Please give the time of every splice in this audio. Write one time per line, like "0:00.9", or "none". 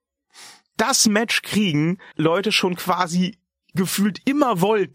0:02.1